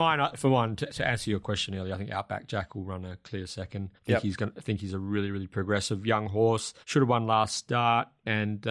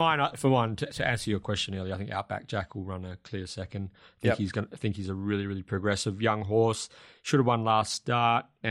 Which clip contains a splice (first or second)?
first